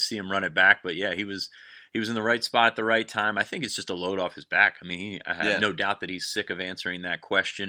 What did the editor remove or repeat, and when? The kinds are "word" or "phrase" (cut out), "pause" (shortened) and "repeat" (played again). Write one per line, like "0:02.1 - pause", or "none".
none

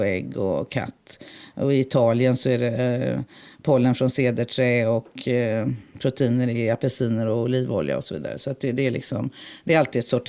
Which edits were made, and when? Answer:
none

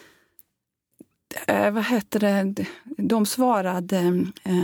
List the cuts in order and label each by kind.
none

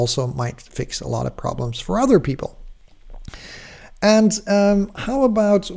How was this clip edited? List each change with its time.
none

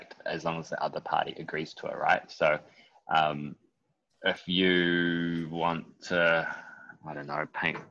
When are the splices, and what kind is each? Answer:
none

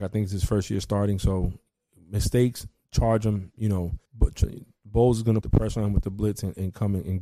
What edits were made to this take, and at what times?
0:04.1 - pause
0:05.4 - word

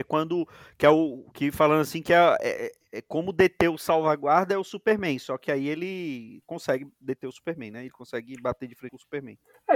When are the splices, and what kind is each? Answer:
none

